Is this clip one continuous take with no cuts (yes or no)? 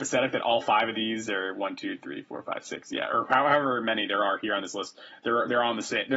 yes